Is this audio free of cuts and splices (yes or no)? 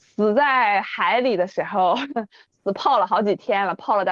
yes